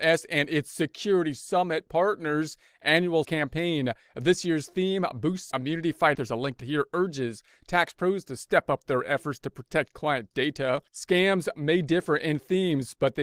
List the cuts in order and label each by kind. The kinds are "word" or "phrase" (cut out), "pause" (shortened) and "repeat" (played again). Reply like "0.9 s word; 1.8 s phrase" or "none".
3.2 s word; 5.5 s word; 6.1 s phrase; 6.6 s word; 10.9 s pause

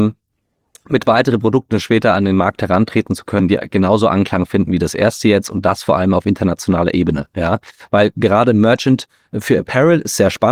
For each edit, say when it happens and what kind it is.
none

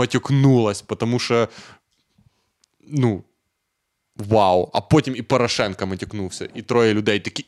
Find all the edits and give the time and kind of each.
none

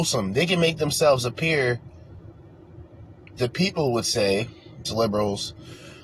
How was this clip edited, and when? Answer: 3.4 s word; 4.8 s word

